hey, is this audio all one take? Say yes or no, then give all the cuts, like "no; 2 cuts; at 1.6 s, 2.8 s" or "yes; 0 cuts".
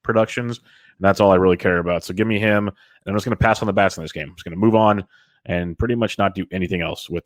yes; 0 cuts